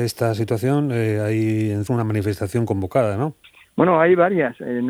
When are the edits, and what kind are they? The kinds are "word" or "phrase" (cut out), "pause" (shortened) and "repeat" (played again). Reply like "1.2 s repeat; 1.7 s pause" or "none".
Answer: 1.9 s word; 3.4 s pause